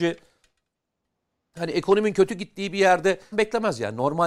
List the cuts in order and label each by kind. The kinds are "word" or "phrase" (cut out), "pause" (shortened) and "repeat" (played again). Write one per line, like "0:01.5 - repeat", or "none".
0:03.3 - phrase